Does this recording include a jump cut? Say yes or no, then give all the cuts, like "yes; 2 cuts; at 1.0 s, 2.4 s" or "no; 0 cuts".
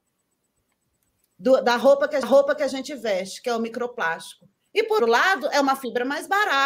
yes; 2 cuts; at 2.2 s, 5.0 s